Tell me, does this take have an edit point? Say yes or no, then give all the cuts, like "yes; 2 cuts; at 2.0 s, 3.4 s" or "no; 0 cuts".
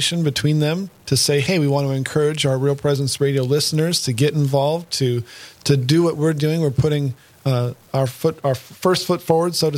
no; 0 cuts